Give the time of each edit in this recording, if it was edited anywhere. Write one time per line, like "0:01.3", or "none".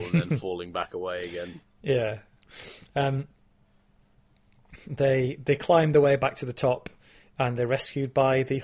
none

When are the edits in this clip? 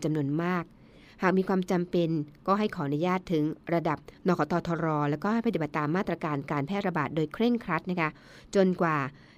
0:04.2

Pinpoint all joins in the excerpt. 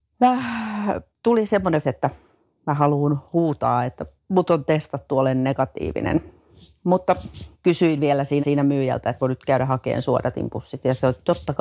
0:01.1
0:01.8
0:03.3
0:04.2
0:07.5
0:08.4
0:09.2

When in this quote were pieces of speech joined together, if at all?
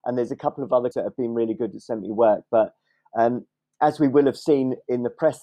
0:00.9

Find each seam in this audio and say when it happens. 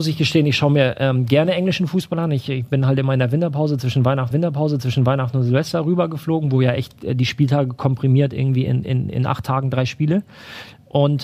0:04.3

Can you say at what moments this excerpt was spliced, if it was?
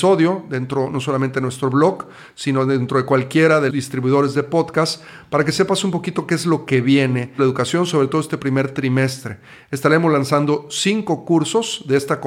0:03.7
0:07.4

